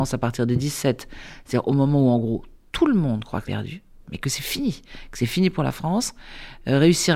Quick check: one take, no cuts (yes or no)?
no